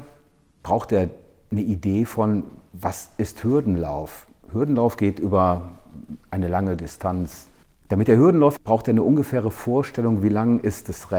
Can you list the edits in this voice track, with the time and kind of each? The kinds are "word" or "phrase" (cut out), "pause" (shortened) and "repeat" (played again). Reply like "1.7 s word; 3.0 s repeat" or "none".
7.6 s pause; 8.6 s phrase